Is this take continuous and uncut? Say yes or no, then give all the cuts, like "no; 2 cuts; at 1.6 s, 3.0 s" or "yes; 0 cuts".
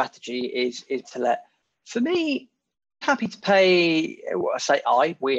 no; 2 cuts; at 1.0 s, 3.0 s